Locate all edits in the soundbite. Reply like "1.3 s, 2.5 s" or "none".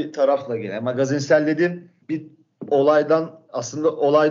2.0 s